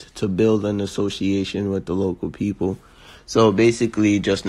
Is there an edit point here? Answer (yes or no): no